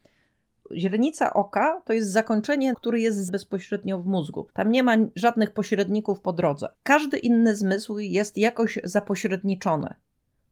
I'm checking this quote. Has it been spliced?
yes; 4 cuts; at 2.7 s, 3.3 s, 4.5 s, 6.7 s

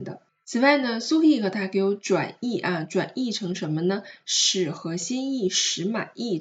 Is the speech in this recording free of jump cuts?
yes; 0 cuts

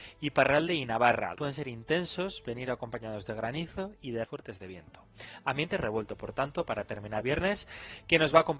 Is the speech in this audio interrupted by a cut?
yes; 3 cuts; at 1.4 s, 4.2 s, 7.2 s

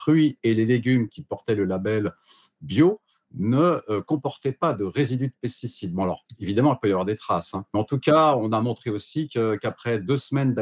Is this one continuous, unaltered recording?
yes; 0 cuts

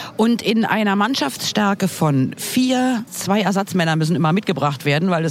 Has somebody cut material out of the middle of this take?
yes; 1 cut; at 3.1 s

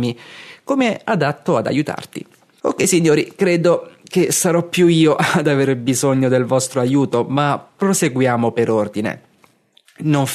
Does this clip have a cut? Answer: no; 0 cuts

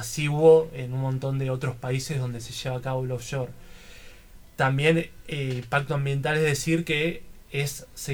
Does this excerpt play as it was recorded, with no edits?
yes; 0 cuts

